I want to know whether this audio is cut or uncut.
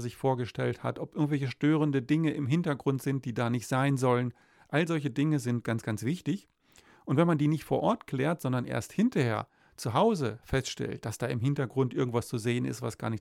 uncut